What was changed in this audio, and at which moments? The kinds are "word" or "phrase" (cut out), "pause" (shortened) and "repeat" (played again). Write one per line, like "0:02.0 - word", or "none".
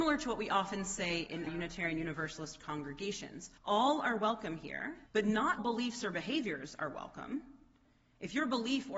0:01.5 - word
0:03.6 - pause
0:05.1 - pause
0:05.6 - word